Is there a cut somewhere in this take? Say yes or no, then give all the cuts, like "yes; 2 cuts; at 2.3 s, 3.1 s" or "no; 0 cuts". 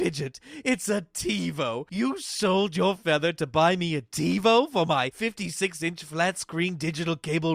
no; 0 cuts